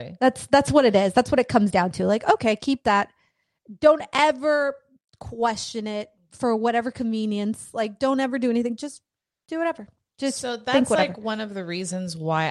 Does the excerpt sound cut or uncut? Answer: uncut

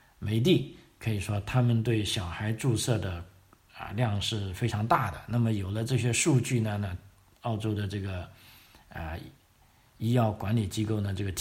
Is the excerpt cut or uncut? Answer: uncut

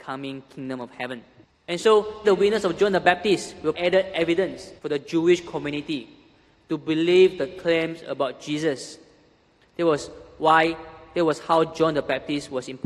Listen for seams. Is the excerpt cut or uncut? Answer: cut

